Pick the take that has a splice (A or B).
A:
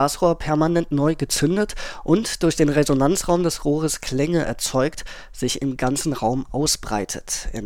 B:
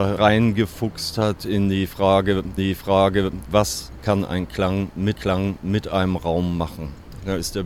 B